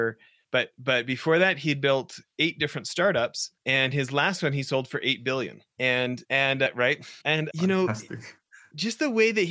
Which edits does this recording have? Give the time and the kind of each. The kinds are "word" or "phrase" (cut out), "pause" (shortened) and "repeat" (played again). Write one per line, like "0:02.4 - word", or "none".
0:07.2 - pause